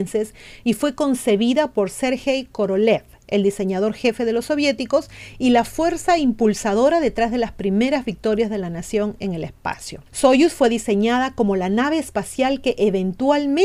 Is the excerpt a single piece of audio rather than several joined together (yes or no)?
no